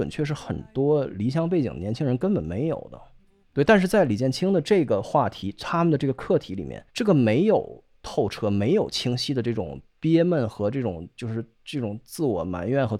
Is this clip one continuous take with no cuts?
no; 3 cuts; at 3.2 s, 6.9 s, 9.9 s

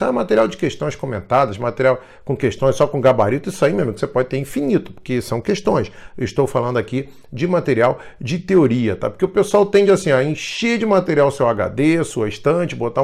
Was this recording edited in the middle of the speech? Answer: no; 0 cuts

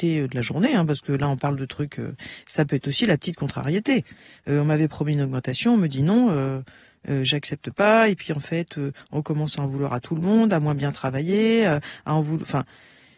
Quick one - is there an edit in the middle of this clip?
no; 0 cuts

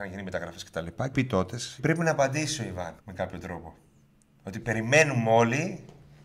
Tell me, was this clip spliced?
yes; 3 cuts; at 1.1 s, 1.8 s, 3.0 s

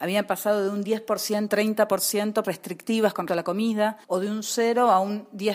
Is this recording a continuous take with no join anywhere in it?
no; 4 cuts; at 1.5 s, 2.4 s, 3.3 s, 4.0 s

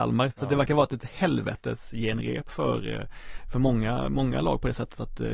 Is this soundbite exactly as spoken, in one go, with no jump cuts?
yes; 0 cuts

